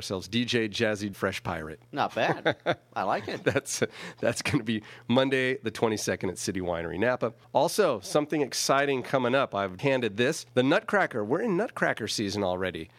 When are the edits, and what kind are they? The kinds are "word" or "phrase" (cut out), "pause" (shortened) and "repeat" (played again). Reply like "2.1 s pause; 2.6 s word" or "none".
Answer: 1.1 s phrase; 1.8 s pause; 7.4 s pause; 9.8 s word; 10.5 s pause